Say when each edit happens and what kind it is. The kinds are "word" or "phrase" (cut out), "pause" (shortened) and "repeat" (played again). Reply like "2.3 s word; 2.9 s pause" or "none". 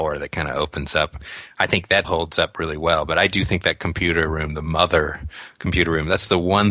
2.0 s word